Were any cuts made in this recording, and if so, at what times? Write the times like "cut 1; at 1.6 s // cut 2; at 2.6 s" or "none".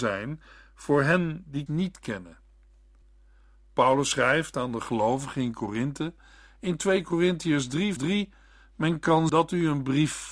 cut 1; at 1.7 s // cut 2; at 8.0 s // cut 3; at 9.3 s